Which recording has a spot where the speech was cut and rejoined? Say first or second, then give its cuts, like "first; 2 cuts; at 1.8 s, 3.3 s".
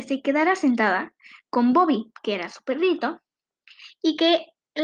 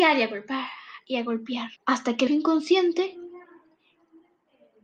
second; 2 cuts; at 1.8 s, 2.3 s